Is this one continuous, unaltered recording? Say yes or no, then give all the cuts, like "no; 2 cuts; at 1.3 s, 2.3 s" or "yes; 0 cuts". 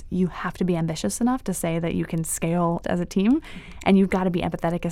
no; 1 cut; at 2.8 s